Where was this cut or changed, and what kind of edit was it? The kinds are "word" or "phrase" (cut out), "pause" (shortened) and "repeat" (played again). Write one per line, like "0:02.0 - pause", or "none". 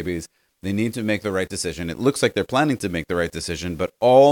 none